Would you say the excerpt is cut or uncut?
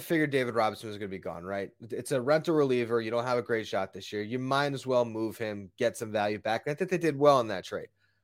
uncut